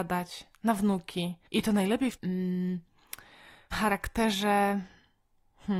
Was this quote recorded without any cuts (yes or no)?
no